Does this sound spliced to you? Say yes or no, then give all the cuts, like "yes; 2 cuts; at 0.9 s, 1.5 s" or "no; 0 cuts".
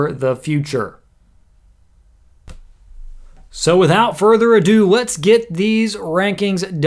no; 0 cuts